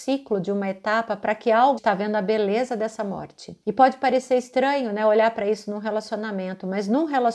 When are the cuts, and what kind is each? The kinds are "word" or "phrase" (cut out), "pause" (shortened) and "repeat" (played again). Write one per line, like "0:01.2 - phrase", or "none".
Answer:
0:01.8 - phrase
0:03.6 - pause

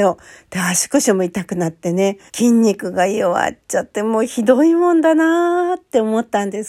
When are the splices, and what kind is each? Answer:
0:02.3 - pause

